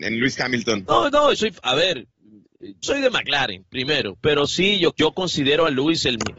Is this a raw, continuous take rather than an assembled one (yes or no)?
no